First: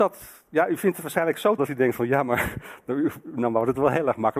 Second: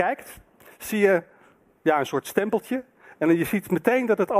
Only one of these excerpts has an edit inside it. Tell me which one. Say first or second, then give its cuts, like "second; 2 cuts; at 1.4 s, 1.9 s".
first; 1 cut; at 1.6 s